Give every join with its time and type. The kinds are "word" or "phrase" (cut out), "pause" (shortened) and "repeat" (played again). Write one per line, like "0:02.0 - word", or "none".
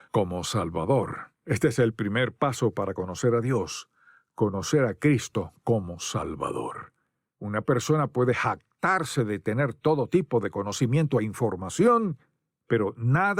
none